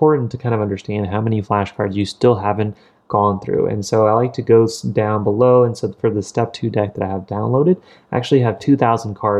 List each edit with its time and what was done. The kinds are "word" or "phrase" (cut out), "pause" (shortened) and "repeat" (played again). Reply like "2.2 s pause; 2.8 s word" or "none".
none

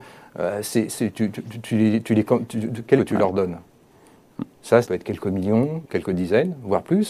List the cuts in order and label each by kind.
3.0 s phrase; 4.8 s word; 5.8 s word

